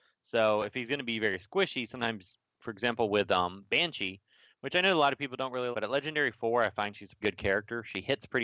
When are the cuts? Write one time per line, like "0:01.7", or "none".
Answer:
0:02.5
0:05.7
0:07.2